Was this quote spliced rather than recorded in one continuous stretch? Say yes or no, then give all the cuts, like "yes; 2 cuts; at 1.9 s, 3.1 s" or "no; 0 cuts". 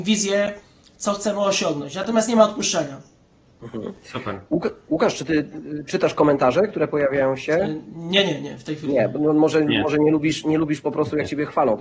no; 0 cuts